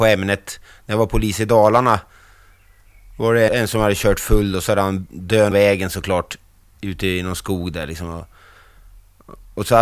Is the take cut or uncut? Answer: cut